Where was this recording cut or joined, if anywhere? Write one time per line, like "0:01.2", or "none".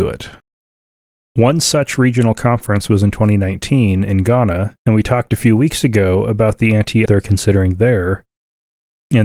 0:04.8
0:07.1